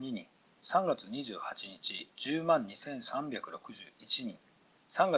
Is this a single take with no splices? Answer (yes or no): no